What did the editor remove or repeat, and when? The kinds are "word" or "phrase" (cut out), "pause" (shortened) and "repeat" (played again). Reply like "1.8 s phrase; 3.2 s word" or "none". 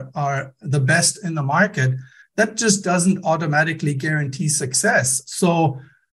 none